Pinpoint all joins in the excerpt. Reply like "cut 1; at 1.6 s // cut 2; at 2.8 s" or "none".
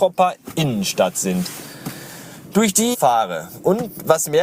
cut 1; at 2.9 s